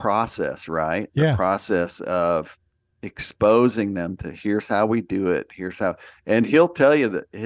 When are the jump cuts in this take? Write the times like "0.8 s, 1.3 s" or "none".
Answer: none